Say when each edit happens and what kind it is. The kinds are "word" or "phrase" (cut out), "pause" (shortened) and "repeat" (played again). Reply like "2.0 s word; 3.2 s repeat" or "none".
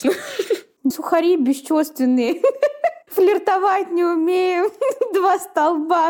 0.9 s word; 3.0 s pause

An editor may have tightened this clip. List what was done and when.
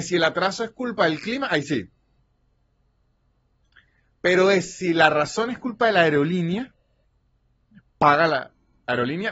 none

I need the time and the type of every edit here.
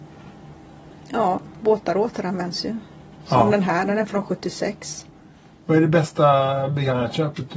none

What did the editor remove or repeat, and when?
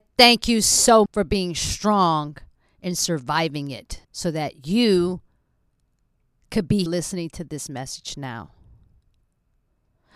1.1 s word; 4.0 s pause; 6.9 s word

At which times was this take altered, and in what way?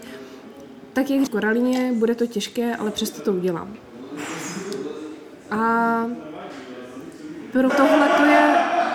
1.3 s phrase; 7.7 s word

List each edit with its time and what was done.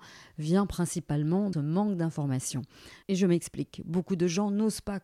1.5 s phrase

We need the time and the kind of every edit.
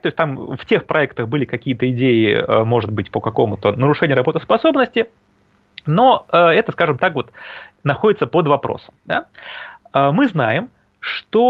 9.0 s pause

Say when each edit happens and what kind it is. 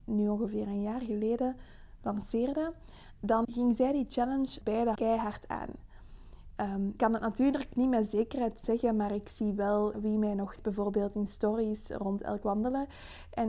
2.0 s word; 3.4 s word; 4.6 s word; 4.9 s word; 7.0 s word; 9.9 s word; 10.6 s word; 12.4 s word

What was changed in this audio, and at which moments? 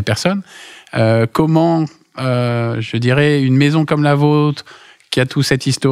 none

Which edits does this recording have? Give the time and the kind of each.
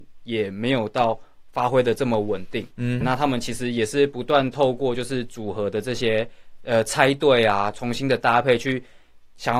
3.0 s word

